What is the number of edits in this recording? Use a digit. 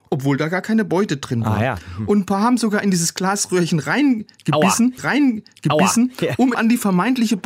2